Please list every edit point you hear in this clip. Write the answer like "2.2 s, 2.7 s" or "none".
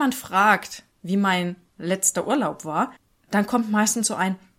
none